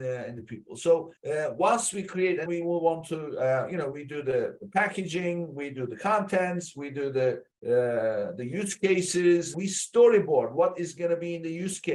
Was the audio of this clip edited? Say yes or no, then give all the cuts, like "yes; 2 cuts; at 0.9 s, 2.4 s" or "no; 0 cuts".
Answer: yes; 4 cuts; at 1.2 s, 2.5 s, 7.5 s, 9.5 s